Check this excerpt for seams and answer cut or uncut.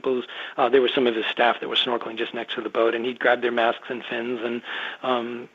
uncut